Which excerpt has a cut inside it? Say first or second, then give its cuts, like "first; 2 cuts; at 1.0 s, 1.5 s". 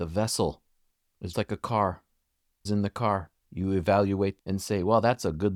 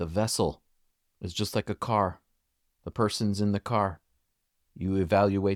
first; 4 cuts; at 1.3 s, 2.7 s, 3.4 s, 4.4 s